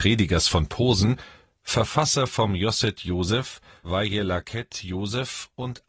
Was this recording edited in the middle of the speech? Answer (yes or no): no